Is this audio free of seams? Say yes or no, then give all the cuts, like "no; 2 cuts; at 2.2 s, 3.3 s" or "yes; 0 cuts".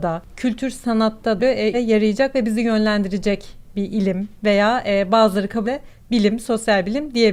no; 3 cuts; at 1.4 s, 1.7 s, 5.6 s